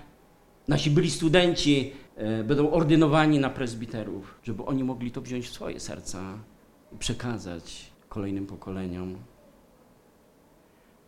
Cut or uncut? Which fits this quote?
cut